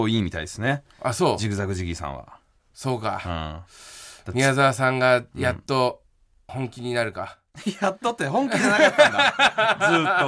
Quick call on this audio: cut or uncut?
uncut